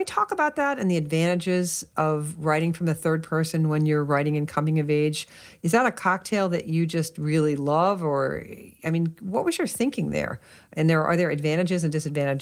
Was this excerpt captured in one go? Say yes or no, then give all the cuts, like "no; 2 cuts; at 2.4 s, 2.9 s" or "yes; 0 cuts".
yes; 0 cuts